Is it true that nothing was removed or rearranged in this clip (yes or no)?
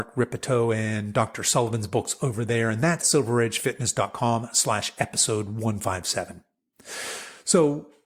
no